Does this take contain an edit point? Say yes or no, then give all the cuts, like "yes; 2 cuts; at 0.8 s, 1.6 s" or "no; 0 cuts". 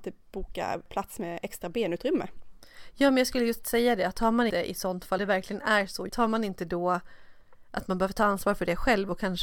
yes; 3 cuts; at 4.5 s, 5.2 s, 6.1 s